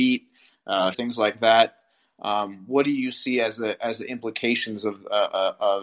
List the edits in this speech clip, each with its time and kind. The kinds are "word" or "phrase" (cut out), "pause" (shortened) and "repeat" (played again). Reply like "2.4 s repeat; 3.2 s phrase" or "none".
0.9 s word